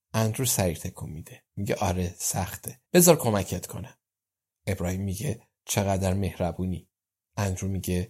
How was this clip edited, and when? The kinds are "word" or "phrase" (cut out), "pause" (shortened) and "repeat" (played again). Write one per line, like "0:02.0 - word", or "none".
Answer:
0:02.9 - pause